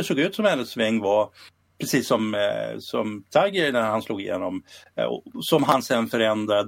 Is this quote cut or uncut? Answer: uncut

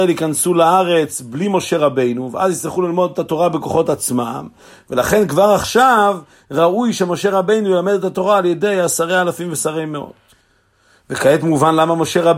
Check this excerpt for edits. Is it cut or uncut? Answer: uncut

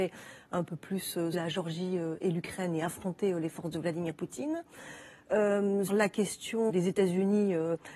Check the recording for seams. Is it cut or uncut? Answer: cut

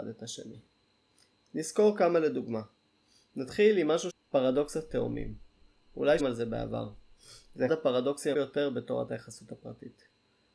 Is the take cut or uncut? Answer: cut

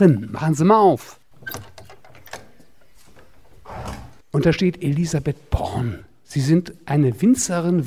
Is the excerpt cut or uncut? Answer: cut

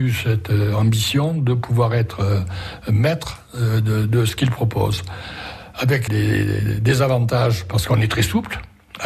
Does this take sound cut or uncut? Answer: cut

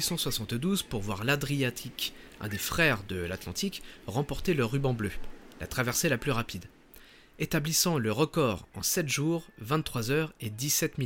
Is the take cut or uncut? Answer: uncut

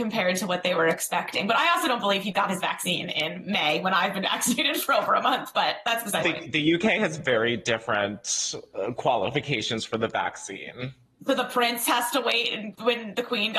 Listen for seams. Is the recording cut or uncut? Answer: cut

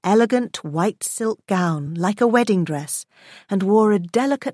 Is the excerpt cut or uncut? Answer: uncut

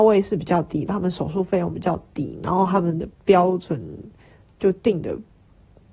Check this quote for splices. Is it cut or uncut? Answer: uncut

